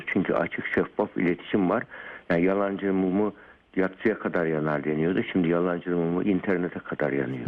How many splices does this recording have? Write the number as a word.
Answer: zero